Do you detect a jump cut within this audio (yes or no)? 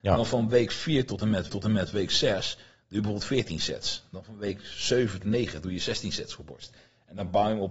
yes